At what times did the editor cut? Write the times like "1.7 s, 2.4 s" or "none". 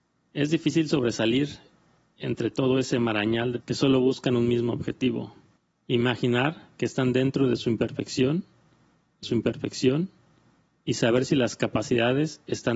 3.6 s, 5.6 s, 9.2 s